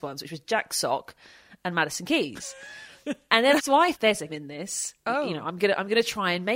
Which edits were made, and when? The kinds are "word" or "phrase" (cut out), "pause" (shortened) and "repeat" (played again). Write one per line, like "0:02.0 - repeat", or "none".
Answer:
0:03.6 - word
0:03.9 - word
0:04.3 - word